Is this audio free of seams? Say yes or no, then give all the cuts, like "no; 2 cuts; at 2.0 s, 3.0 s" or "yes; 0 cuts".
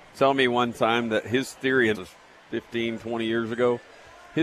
no; 1 cut; at 1.9 s